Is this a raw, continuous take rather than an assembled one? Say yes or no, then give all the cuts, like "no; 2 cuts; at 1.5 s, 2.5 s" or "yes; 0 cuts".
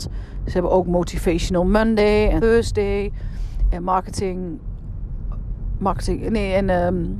no; 1 cut; at 2.4 s